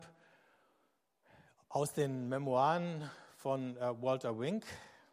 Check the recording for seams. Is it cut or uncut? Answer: uncut